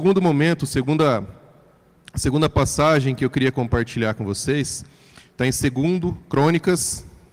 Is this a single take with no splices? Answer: yes; 0 cuts

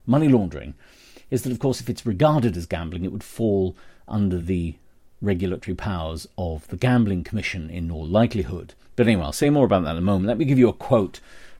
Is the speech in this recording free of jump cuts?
yes; 0 cuts

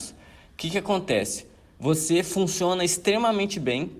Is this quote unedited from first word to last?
yes; 0 cuts

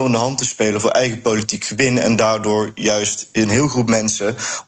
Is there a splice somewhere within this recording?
no; 0 cuts

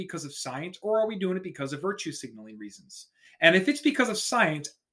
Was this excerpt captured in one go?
yes; 0 cuts

